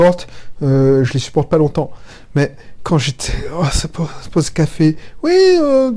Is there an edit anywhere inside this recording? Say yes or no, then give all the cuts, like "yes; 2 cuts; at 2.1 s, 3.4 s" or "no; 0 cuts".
no; 0 cuts